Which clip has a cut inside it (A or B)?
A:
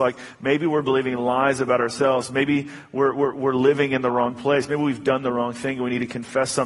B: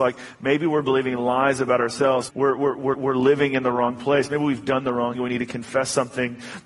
B